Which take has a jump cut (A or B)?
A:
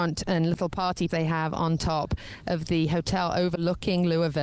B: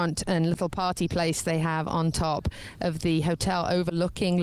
A